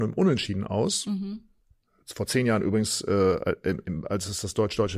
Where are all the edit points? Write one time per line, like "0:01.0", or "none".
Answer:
0:01.6